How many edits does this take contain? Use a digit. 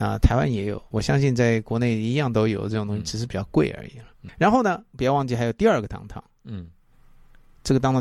1